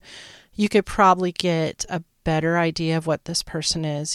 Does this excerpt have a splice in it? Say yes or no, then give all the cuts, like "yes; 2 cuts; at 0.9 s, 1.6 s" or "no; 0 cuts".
no; 0 cuts